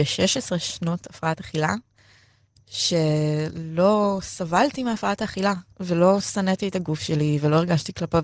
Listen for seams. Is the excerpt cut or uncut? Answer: uncut